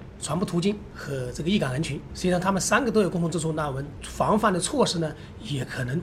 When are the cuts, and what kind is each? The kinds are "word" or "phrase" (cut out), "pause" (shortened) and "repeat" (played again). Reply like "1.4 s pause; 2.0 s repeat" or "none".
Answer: 2.1 s word